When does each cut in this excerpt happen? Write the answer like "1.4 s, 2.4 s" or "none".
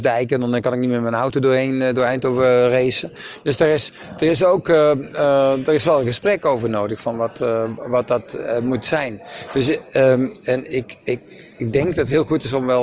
none